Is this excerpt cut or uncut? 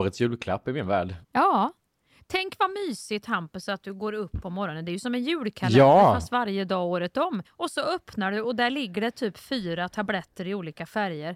cut